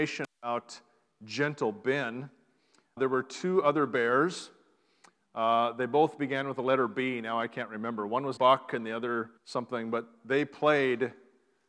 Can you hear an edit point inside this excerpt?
yes; 3 cuts; at 3.0 s, 8.4 s, 9.4 s

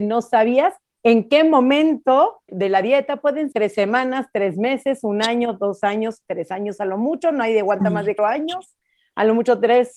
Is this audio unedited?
no; 3 cuts; at 2.5 s, 3.5 s, 8.2 s

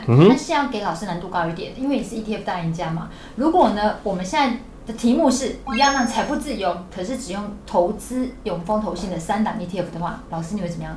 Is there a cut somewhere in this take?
no; 0 cuts

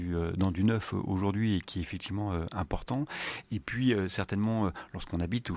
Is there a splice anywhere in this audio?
no; 0 cuts

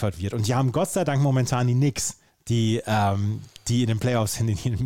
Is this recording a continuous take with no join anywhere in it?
yes; 0 cuts

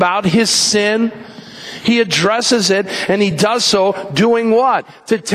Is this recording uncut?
yes; 0 cuts

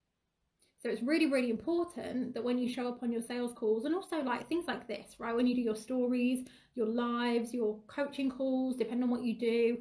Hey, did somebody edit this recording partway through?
no; 0 cuts

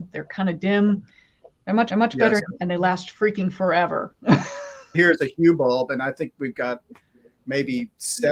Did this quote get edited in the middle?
yes; 3 cuts; at 1.9 s, 2.4 s, 4.9 s

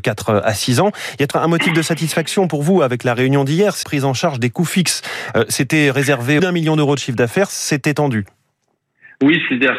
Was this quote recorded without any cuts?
no; 3 cuts; at 1.3 s, 3.8 s, 6.4 s

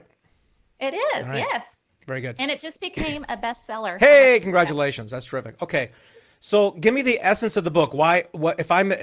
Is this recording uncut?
yes; 0 cuts

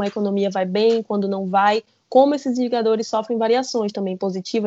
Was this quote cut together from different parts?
no; 0 cuts

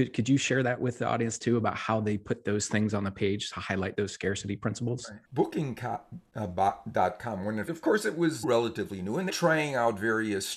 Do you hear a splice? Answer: yes; 5 cuts; at 3.5 s, 5.2 s, 7.7 s, 8.4 s, 9.3 s

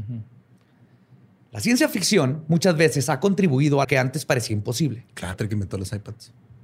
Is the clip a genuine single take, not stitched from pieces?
no; 2 cuts; at 3.8 s, 5.3 s

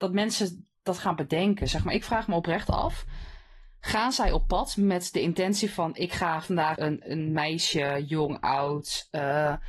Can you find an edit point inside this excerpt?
yes; 1 cut; at 6.7 s

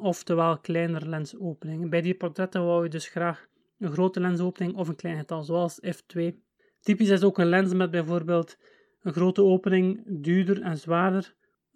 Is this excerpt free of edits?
yes; 0 cuts

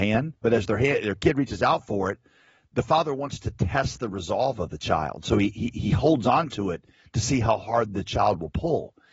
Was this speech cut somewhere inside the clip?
no; 0 cuts

